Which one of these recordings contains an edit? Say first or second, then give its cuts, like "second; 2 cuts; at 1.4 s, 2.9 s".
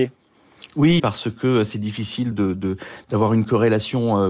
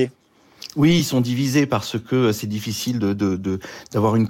first; 2 cuts; at 1.0 s, 2.3 s